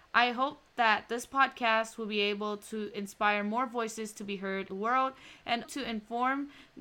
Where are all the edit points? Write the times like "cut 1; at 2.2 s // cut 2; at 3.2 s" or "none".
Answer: cut 1; at 4.7 s // cut 2; at 5.6 s